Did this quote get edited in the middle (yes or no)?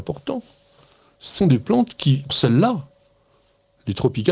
yes